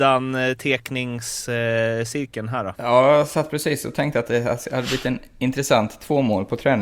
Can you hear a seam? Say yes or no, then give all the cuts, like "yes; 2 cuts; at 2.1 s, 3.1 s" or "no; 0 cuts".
no; 0 cuts